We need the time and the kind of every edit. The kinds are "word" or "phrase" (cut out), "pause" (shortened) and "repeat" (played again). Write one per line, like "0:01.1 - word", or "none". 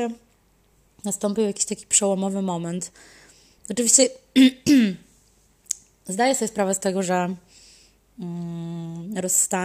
none